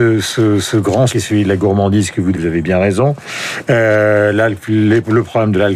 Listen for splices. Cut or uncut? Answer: cut